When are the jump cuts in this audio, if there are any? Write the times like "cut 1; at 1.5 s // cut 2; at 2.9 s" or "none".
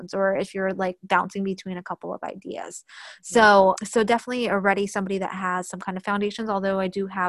cut 1; at 3.8 s